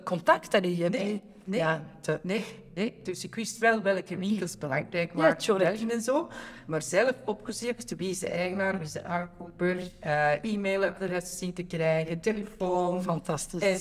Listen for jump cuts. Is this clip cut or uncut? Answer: uncut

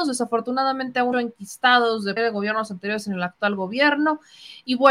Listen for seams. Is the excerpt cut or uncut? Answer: cut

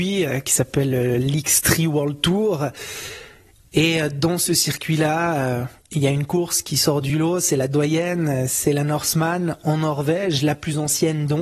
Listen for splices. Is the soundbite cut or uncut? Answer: uncut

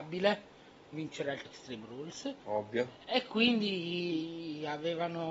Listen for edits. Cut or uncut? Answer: cut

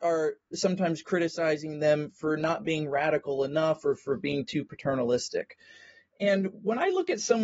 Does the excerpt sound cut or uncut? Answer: uncut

